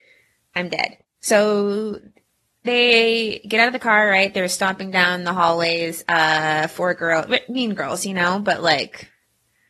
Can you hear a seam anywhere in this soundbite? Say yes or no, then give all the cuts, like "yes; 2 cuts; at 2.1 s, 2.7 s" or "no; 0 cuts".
no; 0 cuts